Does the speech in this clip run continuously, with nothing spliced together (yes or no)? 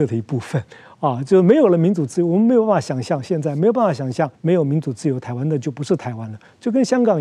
no